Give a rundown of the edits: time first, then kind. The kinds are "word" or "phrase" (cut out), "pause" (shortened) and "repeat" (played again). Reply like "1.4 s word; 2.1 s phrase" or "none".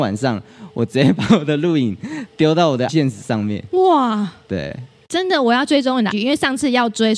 2.9 s word; 6.1 s word